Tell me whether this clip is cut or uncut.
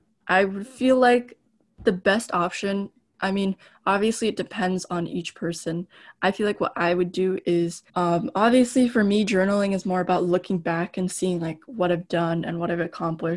cut